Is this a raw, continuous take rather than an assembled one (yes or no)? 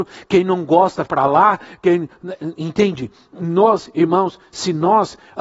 no